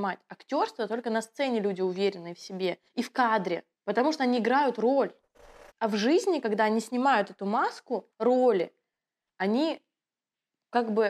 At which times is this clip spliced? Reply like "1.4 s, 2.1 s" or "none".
2.9 s, 3.7 s, 5.7 s, 8.1 s